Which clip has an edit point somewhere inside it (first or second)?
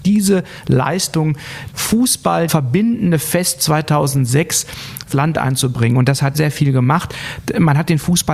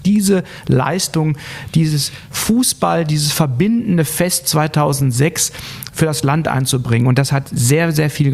first